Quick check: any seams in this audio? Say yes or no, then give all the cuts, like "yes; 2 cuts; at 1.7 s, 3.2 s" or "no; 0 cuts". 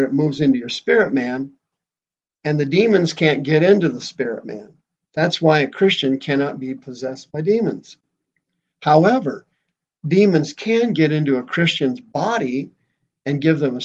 no; 0 cuts